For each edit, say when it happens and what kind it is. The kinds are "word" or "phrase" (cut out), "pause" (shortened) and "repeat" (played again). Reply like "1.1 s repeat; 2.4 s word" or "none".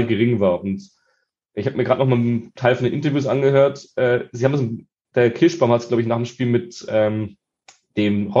none